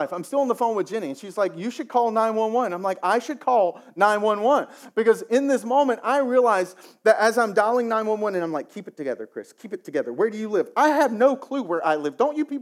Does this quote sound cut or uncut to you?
uncut